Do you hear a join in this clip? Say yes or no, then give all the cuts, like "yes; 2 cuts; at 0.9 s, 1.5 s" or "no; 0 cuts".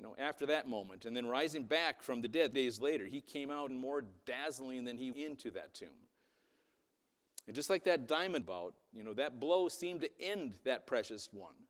yes; 4 cuts; at 2.5 s, 3.7 s, 5.1 s, 8.4 s